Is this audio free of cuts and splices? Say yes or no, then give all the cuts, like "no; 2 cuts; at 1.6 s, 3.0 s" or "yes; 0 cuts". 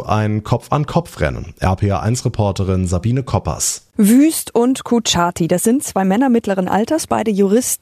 no; 1 cut; at 3.9 s